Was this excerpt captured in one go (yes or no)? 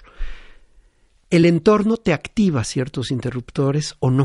yes